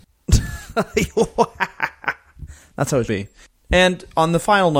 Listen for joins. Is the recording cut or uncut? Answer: cut